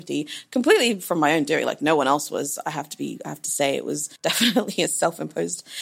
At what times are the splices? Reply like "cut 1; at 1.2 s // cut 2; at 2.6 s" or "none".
cut 1; at 4.2 s